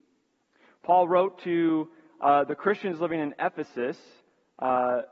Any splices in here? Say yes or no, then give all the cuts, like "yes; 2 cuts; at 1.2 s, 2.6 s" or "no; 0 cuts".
no; 0 cuts